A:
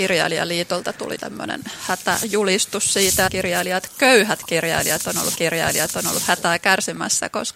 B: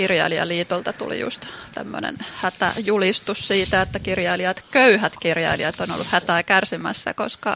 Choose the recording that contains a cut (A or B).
A